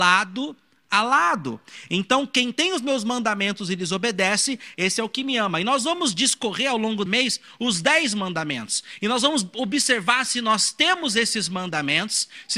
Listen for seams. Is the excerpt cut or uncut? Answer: cut